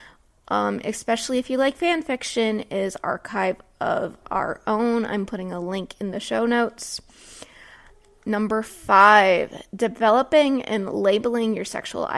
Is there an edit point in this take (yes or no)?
no